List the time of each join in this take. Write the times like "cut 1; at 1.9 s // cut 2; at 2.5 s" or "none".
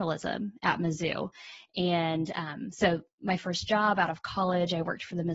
none